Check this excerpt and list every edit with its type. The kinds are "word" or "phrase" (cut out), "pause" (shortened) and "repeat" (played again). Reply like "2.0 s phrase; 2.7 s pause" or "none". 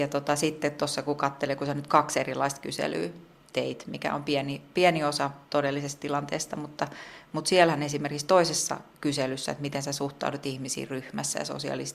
none